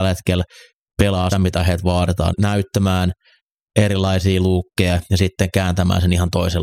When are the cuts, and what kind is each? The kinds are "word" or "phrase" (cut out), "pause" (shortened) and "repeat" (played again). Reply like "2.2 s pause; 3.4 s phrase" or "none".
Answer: 1.3 s word; 2.3 s phrase